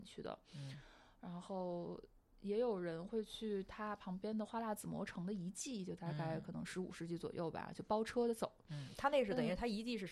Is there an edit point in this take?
no; 0 cuts

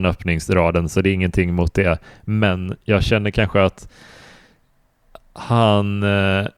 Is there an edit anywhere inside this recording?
no; 0 cuts

